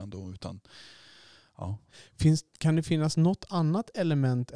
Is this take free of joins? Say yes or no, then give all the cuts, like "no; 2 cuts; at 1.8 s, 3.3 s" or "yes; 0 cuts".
yes; 0 cuts